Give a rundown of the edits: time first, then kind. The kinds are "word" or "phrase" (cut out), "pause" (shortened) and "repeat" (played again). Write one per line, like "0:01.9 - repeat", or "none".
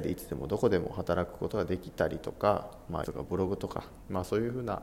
0:03.0 - word

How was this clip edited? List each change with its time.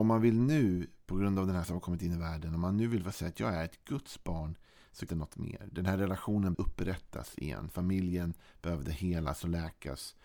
0:01.6 - word
0:05.1 - word
0:06.5 - word

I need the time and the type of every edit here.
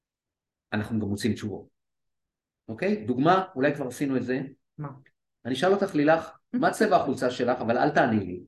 none

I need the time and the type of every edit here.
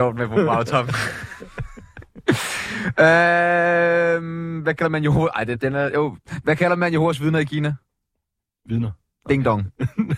0:05.5 - word

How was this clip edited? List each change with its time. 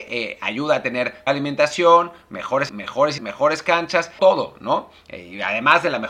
0:01.3 - word
0:02.7 - word
0:03.2 - word
0:04.2 - word

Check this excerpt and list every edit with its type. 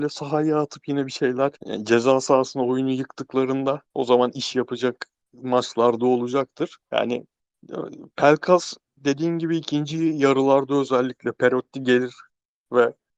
0:01.6 - pause
0:03.9 - pause
0:06.8 - pause

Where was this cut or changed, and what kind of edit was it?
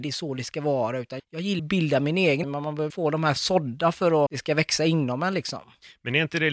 0:01.2 - word
0:01.6 - word
0:02.4 - word
0:02.9 - word
0:03.4 - word
0:04.3 - word

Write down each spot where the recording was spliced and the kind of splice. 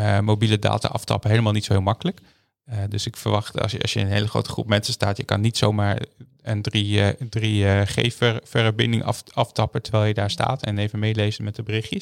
none

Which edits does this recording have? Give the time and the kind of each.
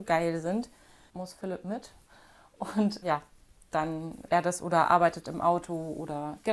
0:01.1 - phrase
0:03.0 - word
0:04.3 - word

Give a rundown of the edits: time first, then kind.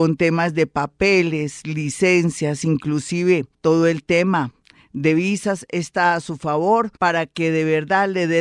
0:03.5 - pause
0:07.0 - pause

